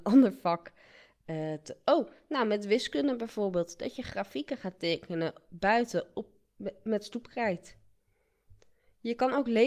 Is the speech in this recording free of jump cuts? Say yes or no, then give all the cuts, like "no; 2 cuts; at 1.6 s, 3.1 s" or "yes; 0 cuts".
yes; 0 cuts